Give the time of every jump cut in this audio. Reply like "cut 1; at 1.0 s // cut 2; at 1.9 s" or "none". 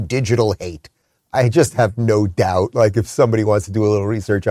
none